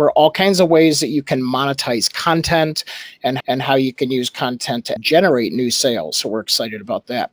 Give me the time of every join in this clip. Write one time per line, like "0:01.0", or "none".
0:03.4
0:05.0